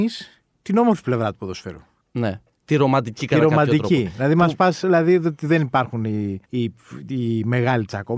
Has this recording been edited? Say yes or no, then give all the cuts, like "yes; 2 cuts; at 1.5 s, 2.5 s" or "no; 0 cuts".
yes; 1 cut; at 6.4 s